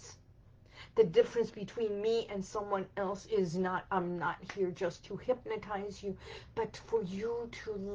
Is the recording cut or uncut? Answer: uncut